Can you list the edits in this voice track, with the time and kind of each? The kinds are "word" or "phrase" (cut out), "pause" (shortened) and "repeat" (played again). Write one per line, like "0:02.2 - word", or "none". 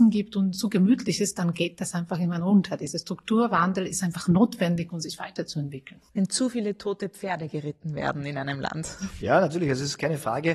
0:06.1 - pause